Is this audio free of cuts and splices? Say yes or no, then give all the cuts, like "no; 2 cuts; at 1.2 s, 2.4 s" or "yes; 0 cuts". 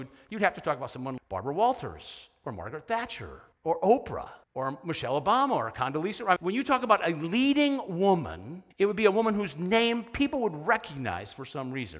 no; 5 cuts; at 1.2 s, 3.5 s, 4.4 s, 6.4 s, 8.7 s